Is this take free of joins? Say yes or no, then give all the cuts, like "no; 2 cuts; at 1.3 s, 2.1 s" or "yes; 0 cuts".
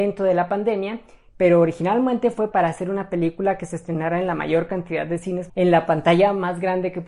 no; 2 cuts; at 2.5 s, 5.5 s